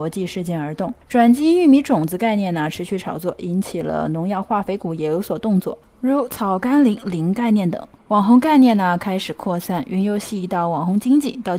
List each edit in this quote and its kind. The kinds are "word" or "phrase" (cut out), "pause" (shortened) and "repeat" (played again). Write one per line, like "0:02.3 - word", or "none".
0:01.0 - pause
0:08.0 - pause

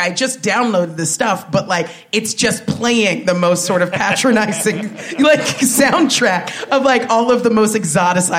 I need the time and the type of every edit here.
none

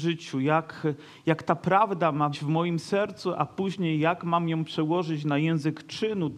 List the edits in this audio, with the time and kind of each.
0:02.3 - word

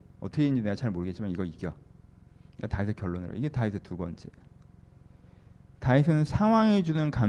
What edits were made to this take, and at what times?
none

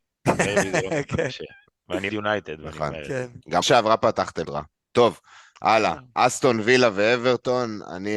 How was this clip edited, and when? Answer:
0:02.1 - word
0:03.6 - word
0:04.4 - word

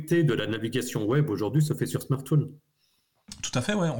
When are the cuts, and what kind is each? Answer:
none

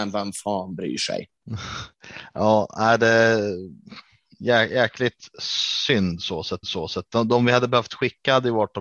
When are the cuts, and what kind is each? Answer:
0:06.6 - repeat

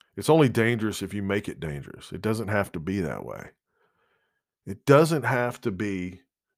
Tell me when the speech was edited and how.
none

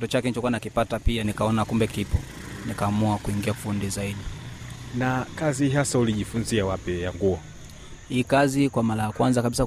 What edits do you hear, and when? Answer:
0:01.9 - word
0:03.6 - word
0:07.1 - word

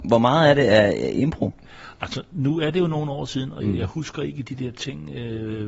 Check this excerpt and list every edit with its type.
0:03.6 - word

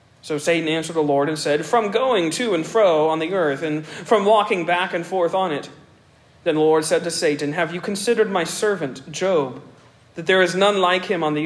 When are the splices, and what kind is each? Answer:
none

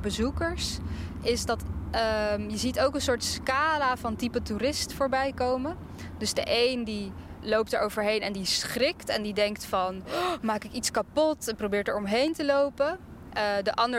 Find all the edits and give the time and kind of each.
0:07.4 - word

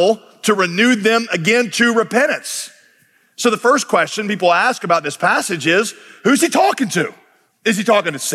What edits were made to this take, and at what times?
none

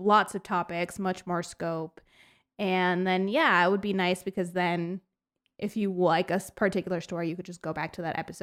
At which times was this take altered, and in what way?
none

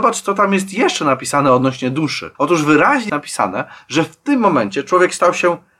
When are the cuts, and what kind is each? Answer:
0:02.3 - pause
0:03.1 - word

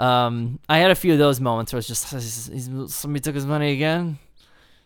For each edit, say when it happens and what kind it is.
0:02.0 - word

